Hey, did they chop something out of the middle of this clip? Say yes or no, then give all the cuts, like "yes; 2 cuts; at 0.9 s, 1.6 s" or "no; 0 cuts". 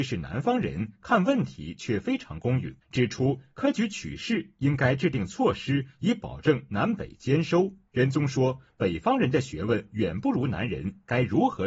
yes; 2 cuts; at 2.8 s, 7.9 s